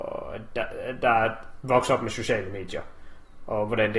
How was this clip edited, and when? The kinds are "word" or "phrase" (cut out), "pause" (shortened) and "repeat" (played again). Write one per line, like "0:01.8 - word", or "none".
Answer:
0:01.6 - word